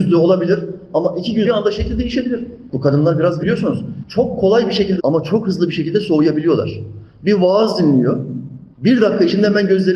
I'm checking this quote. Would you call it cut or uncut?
cut